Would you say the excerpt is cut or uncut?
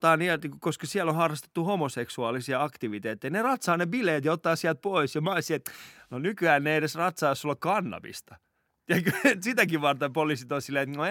uncut